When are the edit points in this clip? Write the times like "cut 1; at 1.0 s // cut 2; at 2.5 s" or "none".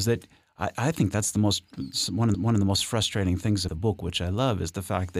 cut 1; at 2.3 s // cut 2; at 3.7 s